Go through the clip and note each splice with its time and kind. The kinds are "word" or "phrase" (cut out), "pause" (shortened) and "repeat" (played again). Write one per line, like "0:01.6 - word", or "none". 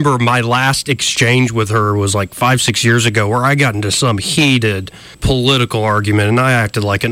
0:05.1 - pause